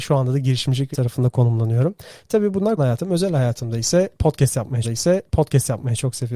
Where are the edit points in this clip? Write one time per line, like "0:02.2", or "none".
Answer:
0:00.9
0:02.8
0:04.8